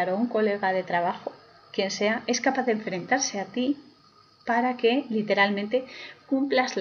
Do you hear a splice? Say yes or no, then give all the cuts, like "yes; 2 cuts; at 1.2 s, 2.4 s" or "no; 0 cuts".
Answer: no; 0 cuts